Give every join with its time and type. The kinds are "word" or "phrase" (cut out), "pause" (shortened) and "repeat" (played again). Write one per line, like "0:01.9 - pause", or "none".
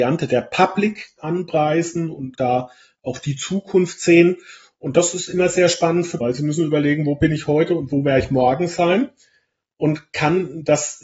0:01.2 - word
0:02.3 - word
0:06.2 - word